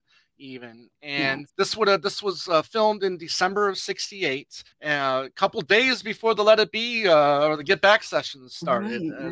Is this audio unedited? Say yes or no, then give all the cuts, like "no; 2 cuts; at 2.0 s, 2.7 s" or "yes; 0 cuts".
no; 2 cuts; at 1.5 s, 4.7 s